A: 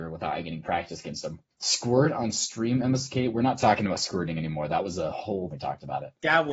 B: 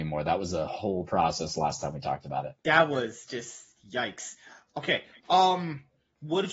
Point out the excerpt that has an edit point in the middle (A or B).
A